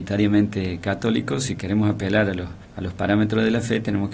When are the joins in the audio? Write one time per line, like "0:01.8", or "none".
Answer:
0:02.6